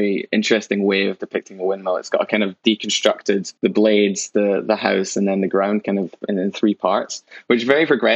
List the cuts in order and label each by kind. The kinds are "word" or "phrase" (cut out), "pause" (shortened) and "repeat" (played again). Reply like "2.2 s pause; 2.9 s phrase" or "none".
3.6 s pause